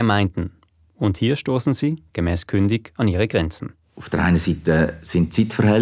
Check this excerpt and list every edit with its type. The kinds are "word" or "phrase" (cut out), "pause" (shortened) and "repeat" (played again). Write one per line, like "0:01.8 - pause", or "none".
none